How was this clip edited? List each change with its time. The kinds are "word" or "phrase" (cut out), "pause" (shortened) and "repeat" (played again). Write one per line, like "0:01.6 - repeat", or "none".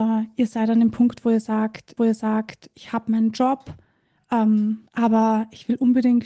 0:02.0 - repeat
0:04.9 - pause